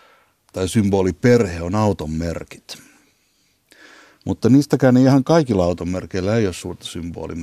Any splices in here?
no; 0 cuts

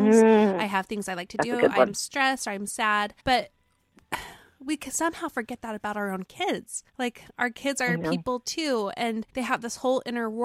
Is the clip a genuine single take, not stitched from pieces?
no; 3 cuts; at 3.2 s, 6.9 s, 9.3 s

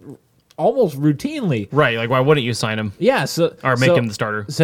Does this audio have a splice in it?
no; 0 cuts

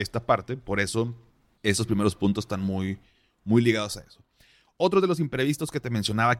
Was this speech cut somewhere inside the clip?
no; 0 cuts

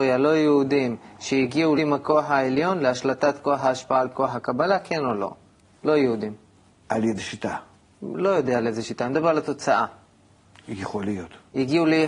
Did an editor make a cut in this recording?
yes; 3 cuts; at 1.8 s, 4.1 s, 7.2 s

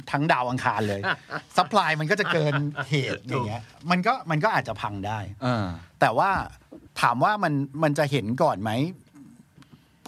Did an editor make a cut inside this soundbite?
yes; 1 cut; at 6.9 s

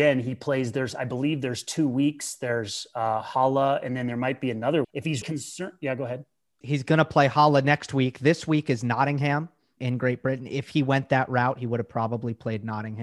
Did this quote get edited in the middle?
yes; 4 cuts; at 4.8 s, 5.2 s, 6.6 s, 9.8 s

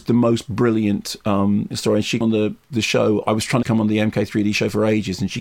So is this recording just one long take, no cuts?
no; 3 cuts; at 1.7 s, 2.2 s, 3.6 s

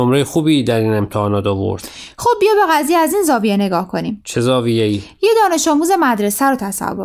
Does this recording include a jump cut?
no; 0 cuts

